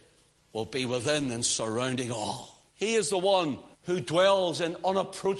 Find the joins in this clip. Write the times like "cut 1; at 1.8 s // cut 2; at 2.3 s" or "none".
cut 1; at 2.7 s // cut 2; at 3.7 s